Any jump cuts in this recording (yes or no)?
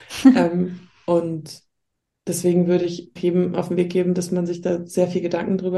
yes